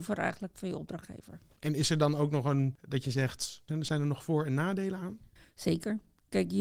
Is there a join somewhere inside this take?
no; 0 cuts

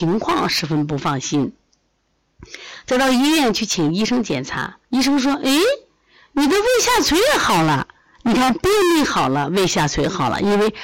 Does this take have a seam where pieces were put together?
yes; 1 cut; at 4.8 s

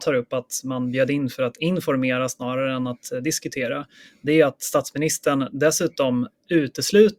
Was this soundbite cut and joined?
no; 0 cuts

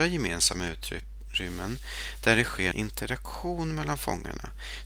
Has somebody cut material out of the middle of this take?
yes; 1 cut; at 2.7 s

